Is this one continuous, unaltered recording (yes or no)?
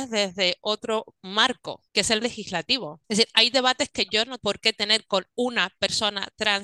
no